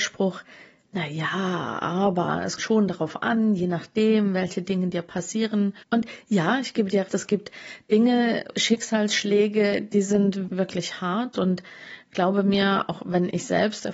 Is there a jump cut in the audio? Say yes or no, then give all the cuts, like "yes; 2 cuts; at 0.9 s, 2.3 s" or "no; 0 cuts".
yes; 5 cuts; at 2.6 s, 5.8 s, 7.1 s, 8.5 s, 10.5 s